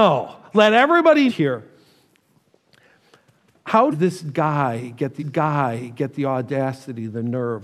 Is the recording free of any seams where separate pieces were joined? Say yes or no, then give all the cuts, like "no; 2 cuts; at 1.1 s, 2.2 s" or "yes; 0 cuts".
no; 3 cuts; at 1.3 s, 3.9 s, 5.2 s